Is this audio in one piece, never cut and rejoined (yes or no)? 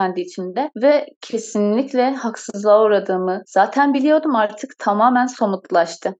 yes